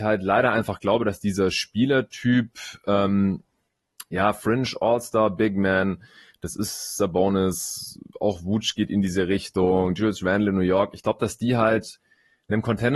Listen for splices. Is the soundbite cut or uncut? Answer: uncut